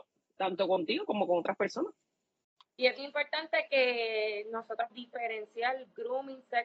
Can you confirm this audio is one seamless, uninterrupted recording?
no; 2 cuts; at 3.0 s, 4.9 s

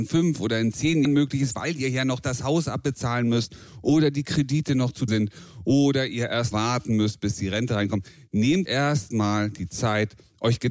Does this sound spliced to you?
yes; 4 cuts; at 1.0 s, 5.1 s, 6.5 s, 8.6 s

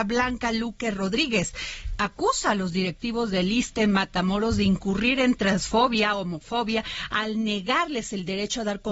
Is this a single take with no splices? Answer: no; 1 cut; at 2.0 s

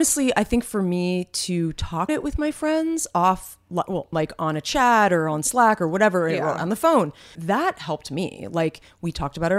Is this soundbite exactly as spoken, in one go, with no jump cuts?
no; 3 cuts; at 2.1 s, 4.1 s, 7.3 s

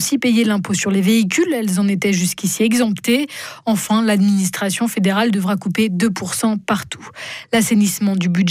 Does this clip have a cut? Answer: no; 0 cuts

